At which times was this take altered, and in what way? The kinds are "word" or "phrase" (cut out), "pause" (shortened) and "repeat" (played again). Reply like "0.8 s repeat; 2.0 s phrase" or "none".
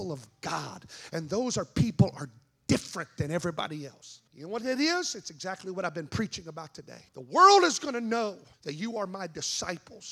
4.3 s pause; 7.1 s pause; 8.5 s pause